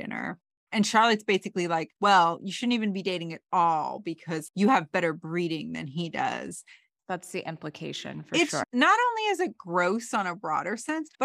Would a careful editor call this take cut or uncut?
uncut